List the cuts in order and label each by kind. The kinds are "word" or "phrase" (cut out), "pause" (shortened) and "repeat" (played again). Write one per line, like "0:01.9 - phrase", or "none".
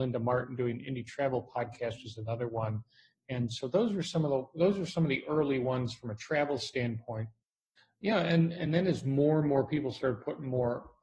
none